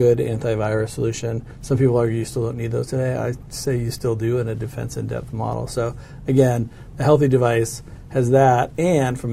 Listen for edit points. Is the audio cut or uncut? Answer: uncut